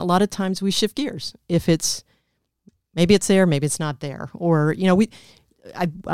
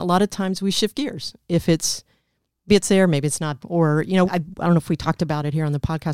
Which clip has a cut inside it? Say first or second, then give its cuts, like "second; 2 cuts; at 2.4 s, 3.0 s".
second; 3 cuts; at 2.7 s, 3.6 s, 4.2 s